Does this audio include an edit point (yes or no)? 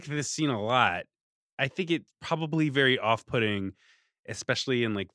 no